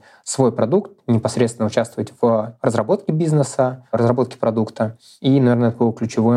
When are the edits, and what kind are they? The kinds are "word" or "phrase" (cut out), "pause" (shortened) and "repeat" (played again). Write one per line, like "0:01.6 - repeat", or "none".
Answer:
none